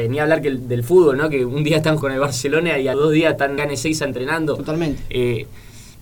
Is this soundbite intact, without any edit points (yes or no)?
no